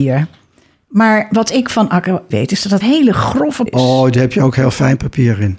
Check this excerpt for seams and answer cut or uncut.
cut